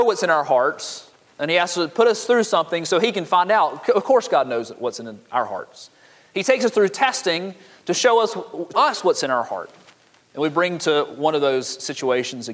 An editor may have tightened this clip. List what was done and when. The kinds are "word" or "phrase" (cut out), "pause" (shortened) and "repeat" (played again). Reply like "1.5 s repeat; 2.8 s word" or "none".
8.7 s word